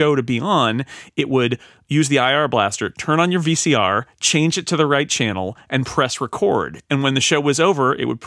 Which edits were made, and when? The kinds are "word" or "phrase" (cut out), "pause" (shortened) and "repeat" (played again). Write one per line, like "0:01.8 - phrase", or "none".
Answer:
none